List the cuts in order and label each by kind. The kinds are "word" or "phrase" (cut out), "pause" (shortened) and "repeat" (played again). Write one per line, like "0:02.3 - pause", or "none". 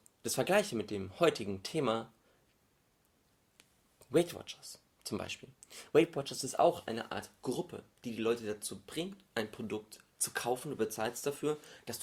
none